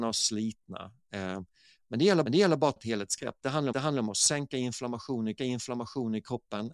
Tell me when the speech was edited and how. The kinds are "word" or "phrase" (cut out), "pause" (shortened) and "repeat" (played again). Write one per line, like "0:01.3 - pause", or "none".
0:02.2 - repeat
0:02.8 - word
0:03.7 - repeat
0:05.4 - repeat